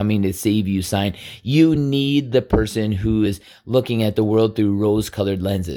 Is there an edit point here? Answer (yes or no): no